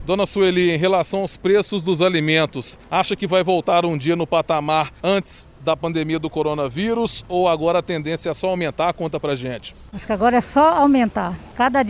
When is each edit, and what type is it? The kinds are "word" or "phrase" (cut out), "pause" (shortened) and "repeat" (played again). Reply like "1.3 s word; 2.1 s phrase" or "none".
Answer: none